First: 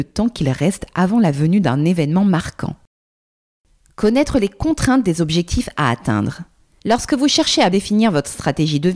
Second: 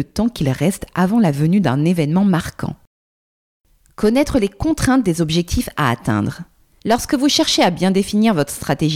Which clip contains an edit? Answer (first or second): first